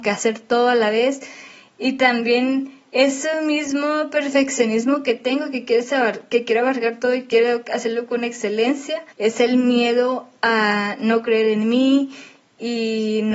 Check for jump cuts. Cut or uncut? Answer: cut